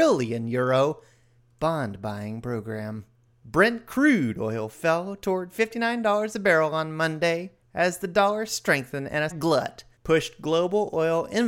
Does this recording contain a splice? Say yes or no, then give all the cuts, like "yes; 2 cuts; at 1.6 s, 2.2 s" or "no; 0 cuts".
yes; 2 cuts; at 3.3 s, 9.3 s